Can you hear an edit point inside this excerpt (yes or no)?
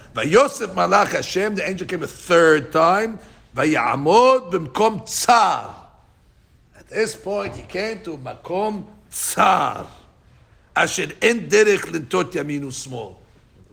no